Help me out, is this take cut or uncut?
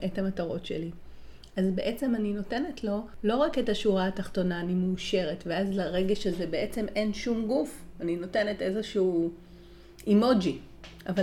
uncut